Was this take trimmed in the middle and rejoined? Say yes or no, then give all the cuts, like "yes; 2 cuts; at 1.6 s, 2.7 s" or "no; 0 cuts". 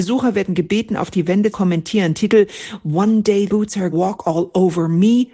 yes; 3 cuts; at 1.5 s, 3.5 s, 3.9 s